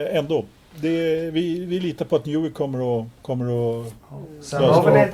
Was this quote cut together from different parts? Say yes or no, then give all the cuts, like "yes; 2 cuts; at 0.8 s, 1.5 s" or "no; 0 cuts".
yes; 2 cuts; at 3.2 s, 4.0 s